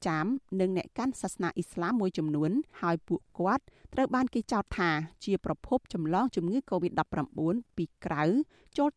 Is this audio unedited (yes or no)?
no